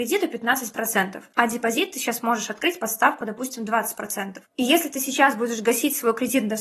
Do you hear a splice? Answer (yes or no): no